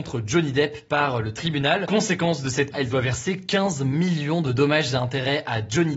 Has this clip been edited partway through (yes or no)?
yes